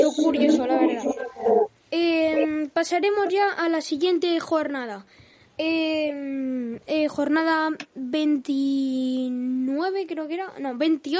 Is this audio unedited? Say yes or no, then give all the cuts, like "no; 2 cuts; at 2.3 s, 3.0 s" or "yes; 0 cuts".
yes; 0 cuts